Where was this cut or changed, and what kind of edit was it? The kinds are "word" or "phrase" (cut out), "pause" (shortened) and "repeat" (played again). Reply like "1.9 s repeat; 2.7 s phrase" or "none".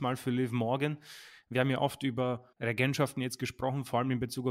2.5 s pause